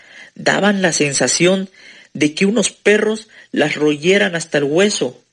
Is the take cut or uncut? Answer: uncut